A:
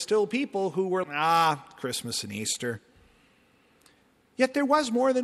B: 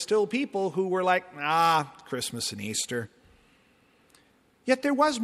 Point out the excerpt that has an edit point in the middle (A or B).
A